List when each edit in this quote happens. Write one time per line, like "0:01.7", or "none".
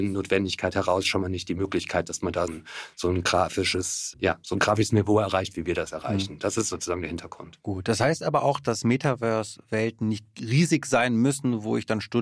0:02.5
0:04.1